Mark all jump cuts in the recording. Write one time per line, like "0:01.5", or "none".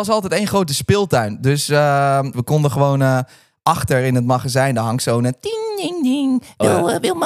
none